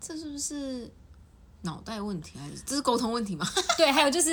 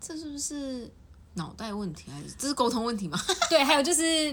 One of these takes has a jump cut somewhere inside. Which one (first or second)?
second